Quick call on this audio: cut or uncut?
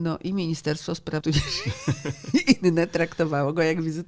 cut